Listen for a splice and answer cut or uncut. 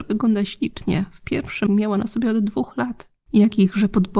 cut